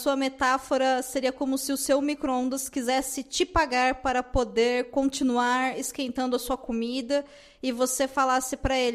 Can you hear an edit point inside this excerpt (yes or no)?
no